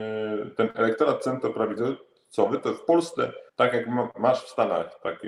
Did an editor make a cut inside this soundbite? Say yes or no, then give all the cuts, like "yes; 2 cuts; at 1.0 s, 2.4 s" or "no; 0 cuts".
yes; 1 cut; at 3.5 s